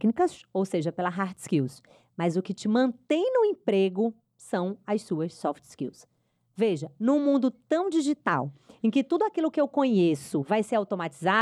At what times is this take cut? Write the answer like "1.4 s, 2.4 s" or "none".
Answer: none